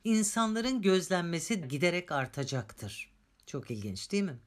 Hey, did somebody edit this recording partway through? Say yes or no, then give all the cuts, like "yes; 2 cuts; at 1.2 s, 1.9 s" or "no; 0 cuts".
yes; 1 cut; at 1.6 s